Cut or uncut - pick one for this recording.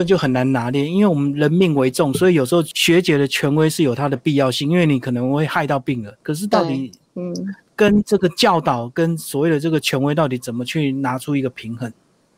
cut